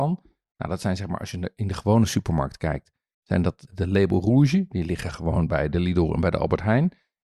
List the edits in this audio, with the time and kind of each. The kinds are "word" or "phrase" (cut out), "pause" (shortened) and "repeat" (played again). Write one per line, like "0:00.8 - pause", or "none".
0:03.7 - word